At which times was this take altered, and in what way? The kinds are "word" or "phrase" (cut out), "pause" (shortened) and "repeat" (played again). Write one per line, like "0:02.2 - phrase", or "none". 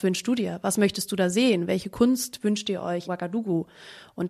0:03.1 - word